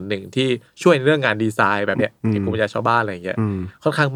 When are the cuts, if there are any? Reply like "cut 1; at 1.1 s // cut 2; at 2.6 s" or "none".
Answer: cut 1; at 2.0 s